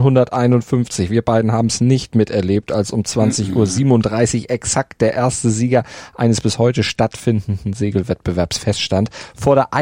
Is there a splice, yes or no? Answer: no